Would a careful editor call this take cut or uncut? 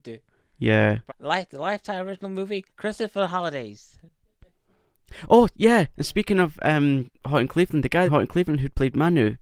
cut